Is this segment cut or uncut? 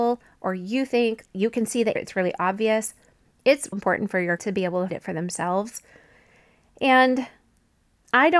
cut